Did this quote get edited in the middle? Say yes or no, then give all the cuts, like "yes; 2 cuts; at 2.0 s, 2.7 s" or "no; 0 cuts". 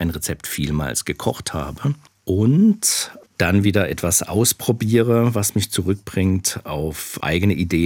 no; 0 cuts